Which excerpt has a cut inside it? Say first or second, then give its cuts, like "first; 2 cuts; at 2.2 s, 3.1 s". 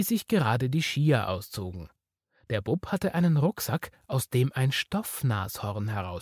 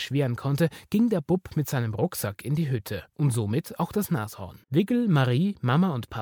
second; 2 cuts; at 3.1 s, 4.6 s